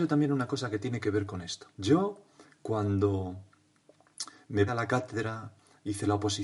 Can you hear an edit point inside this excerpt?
yes; 2 cuts; at 1.7 s, 4.7 s

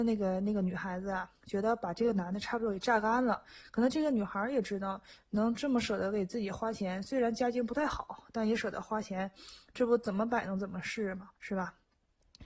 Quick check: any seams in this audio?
yes; 2 cuts; at 1.4 s, 11.4 s

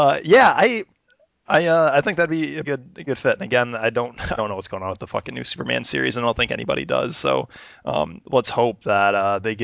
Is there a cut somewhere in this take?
yes; 3 cuts; at 2.6 s, 3.1 s, 4.4 s

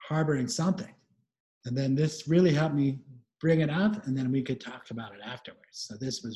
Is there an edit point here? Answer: no; 0 cuts

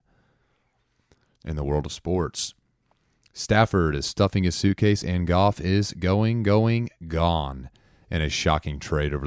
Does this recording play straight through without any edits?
yes; 0 cuts

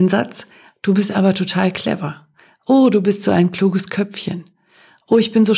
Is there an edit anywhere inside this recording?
no; 0 cuts

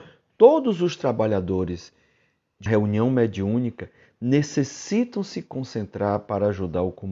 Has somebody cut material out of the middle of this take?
yes; 1 cut; at 2.7 s

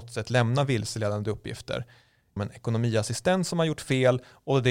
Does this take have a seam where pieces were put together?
yes; 1 cut; at 2.4 s

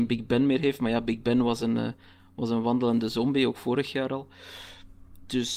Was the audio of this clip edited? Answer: no; 0 cuts

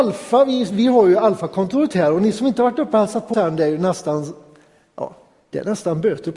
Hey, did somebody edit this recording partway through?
yes; 1 cut; at 3.3 s

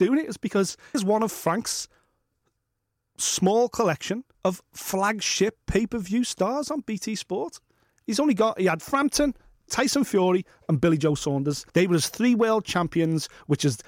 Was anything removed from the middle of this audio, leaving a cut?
yes; 3 cuts; at 0.9 s, 4.3 s, 11.7 s

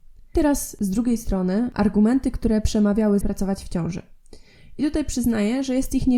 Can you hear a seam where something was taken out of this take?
yes; 1 cut; at 3.2 s

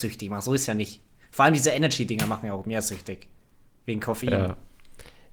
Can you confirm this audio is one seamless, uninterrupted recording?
yes; 0 cuts

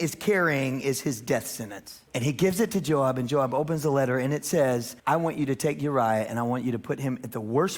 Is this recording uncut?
no; 2 cuts; at 2.1 s, 5.0 s

